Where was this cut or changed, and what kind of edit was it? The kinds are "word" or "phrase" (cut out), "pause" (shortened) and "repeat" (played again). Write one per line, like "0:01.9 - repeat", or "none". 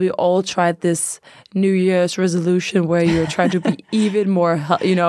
none